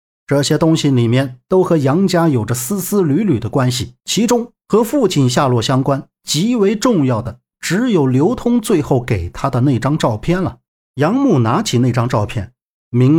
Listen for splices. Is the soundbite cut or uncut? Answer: cut